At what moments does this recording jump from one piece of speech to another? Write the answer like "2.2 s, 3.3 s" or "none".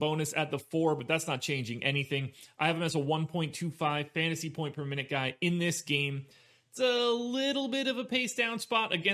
none